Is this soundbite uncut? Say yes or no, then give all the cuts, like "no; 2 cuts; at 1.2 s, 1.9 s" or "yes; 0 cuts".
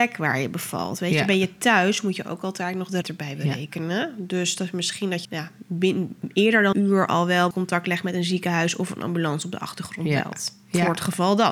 no; 4 cuts; at 3.0 s, 5.2 s, 6.7 s, 7.5 s